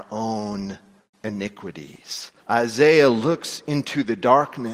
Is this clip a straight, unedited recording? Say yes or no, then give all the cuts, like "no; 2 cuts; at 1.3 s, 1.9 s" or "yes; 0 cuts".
no; 1 cut; at 2.4 s